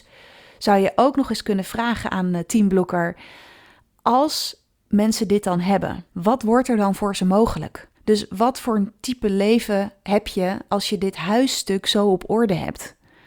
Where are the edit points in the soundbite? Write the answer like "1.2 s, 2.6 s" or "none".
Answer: 6.1 s, 7.9 s